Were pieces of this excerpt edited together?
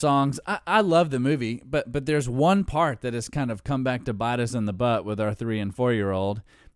no; 0 cuts

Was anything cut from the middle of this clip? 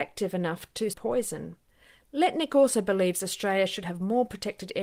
yes; 1 cut; at 0.9 s

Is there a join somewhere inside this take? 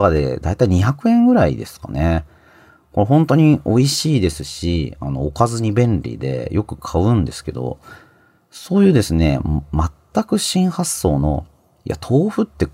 no; 0 cuts

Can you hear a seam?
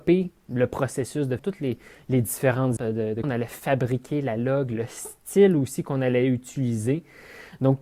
yes; 3 cuts; at 1.4 s, 2.8 s, 3.2 s

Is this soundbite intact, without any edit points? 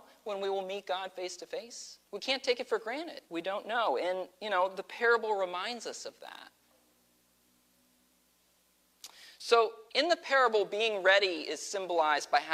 no; 4 cuts; at 2.0 s, 3.3 s, 4.3 s, 9.9 s

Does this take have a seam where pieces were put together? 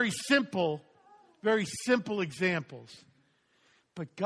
no; 0 cuts

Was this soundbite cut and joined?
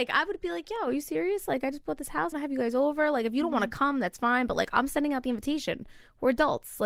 yes; 1 cut; at 2.3 s

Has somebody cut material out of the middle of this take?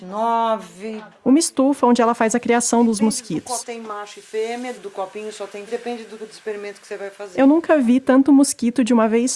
yes; 4 cuts; at 3.6 s, 4.7 s, 5.7 s, 6.2 s

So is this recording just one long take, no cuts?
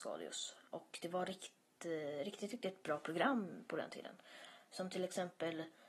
yes; 0 cuts

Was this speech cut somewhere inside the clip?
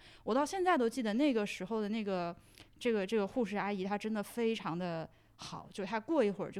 no; 0 cuts

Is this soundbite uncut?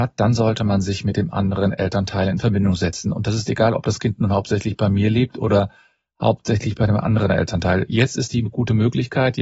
yes; 0 cuts

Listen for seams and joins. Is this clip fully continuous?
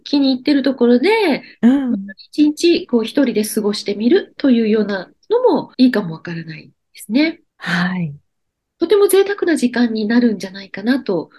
no; 2 cuts; at 5.7 s, 7.5 s

